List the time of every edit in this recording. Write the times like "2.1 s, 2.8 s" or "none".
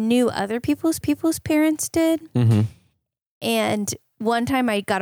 1.0 s